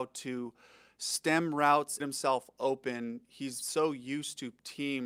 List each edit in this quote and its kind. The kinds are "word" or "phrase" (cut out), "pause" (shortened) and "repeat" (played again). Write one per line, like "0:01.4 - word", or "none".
0:02.0 - phrase